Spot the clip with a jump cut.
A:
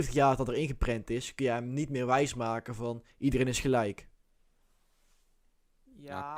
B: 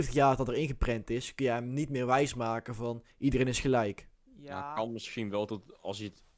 B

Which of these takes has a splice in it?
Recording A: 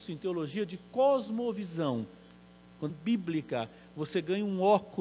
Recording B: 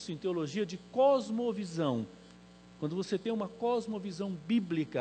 A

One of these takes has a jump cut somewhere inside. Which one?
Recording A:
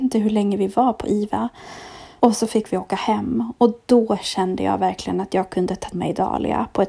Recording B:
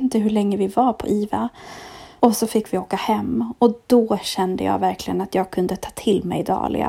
A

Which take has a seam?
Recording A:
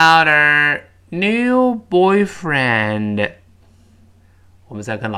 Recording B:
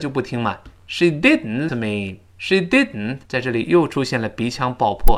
B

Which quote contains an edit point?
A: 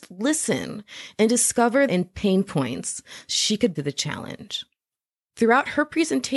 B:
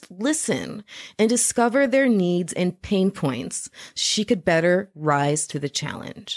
A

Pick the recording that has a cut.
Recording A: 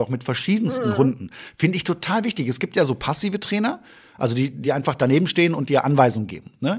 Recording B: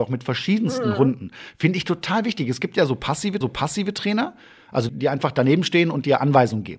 B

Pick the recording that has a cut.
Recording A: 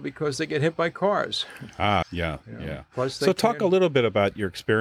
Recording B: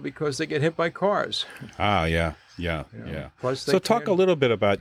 A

